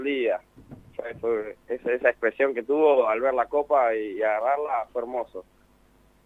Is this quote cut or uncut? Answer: uncut